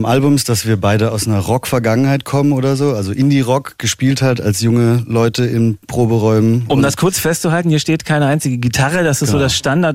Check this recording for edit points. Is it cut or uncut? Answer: cut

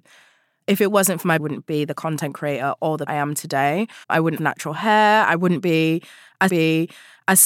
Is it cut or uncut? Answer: cut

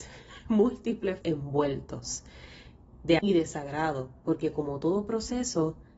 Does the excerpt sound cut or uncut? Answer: cut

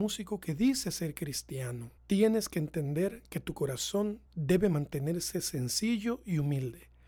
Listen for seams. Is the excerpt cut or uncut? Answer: cut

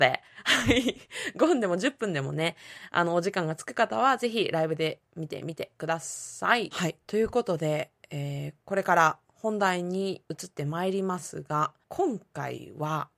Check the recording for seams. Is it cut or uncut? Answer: cut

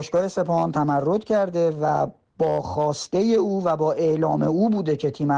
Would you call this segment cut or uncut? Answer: uncut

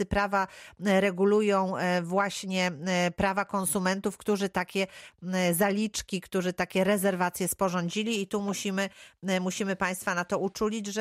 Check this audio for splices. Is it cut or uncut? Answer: uncut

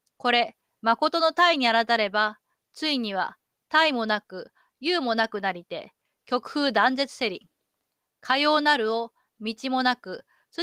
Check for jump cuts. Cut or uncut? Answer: uncut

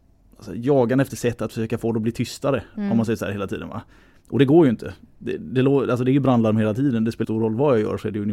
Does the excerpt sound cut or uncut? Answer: cut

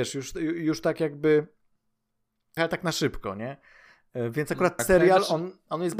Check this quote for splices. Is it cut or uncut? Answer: cut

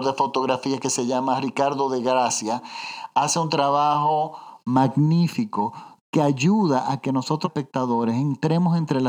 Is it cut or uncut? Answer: cut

